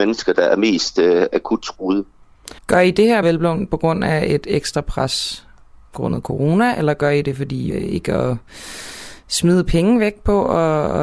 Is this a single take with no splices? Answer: no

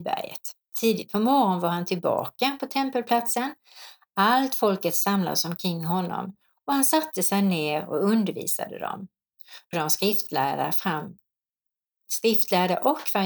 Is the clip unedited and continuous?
no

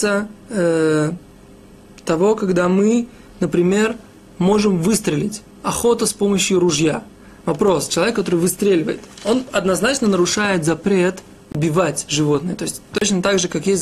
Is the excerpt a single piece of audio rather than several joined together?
yes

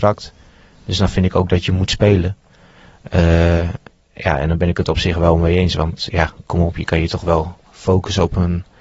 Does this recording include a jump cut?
no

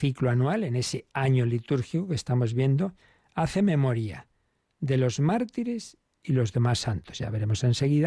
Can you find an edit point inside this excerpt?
no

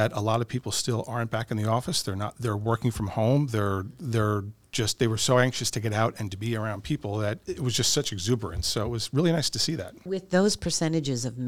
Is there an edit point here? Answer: no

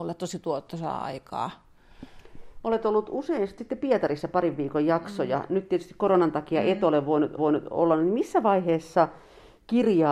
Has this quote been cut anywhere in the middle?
yes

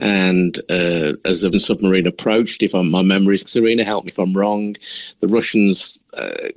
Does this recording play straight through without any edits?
no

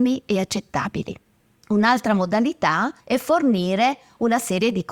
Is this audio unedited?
no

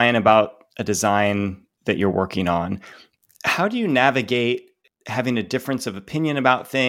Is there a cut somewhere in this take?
no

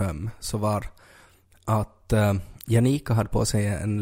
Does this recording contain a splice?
no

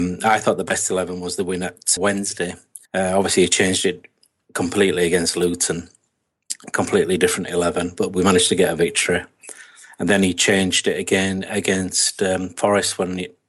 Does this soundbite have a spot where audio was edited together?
yes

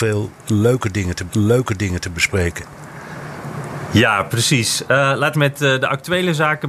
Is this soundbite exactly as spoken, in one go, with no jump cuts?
no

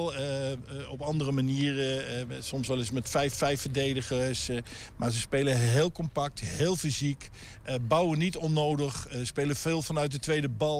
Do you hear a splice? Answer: yes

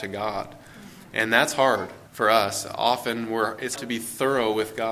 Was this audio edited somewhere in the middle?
yes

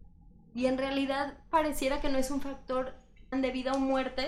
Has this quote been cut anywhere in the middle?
yes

